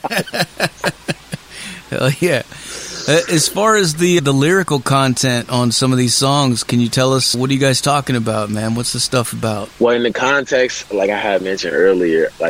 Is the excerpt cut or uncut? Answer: cut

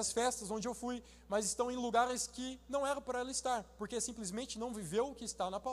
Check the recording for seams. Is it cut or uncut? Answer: uncut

